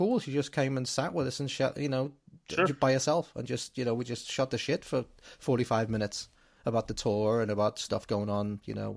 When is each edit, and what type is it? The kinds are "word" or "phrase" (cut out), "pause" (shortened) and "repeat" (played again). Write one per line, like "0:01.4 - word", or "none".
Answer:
none